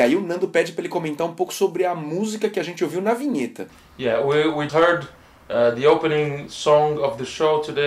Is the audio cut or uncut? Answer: cut